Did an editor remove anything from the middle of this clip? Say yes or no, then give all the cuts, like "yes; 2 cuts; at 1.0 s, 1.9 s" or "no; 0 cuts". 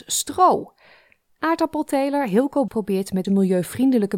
yes; 2 cuts; at 2.7 s, 3.2 s